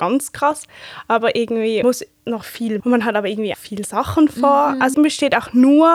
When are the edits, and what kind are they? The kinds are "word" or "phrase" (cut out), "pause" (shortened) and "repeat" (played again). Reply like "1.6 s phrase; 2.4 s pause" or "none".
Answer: 1.8 s phrase; 2.8 s word; 3.5 s word; 4.9 s phrase